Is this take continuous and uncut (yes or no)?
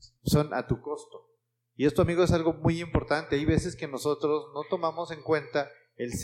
yes